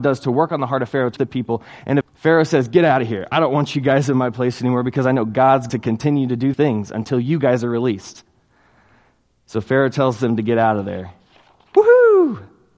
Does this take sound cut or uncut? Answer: cut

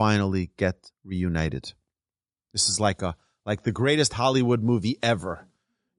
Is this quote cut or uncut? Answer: uncut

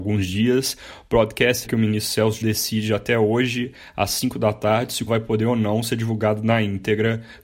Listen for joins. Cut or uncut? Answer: cut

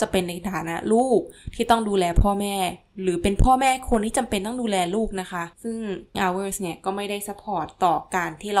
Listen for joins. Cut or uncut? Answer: cut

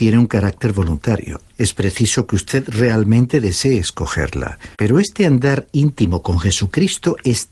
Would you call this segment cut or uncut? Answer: cut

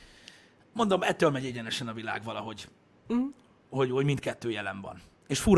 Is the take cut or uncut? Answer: uncut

